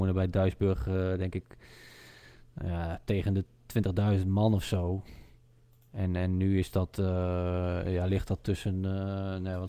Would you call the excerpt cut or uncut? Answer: uncut